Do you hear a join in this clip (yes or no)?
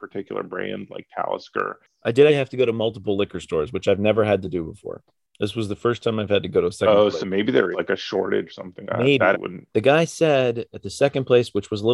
yes